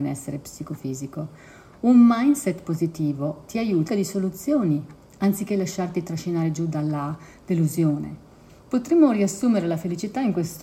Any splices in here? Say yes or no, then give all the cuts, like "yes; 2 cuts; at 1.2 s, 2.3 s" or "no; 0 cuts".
yes; 1 cut; at 3.9 s